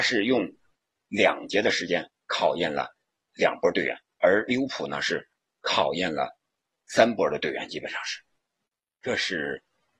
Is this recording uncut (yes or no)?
no